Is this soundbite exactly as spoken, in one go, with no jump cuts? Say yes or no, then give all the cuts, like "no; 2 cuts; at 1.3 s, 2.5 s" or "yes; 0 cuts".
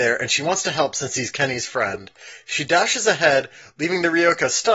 yes; 0 cuts